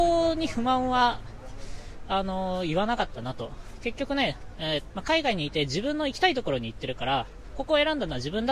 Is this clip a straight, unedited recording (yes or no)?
no